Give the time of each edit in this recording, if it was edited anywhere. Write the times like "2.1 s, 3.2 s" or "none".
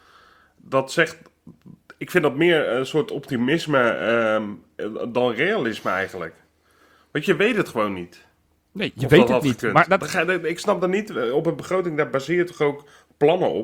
none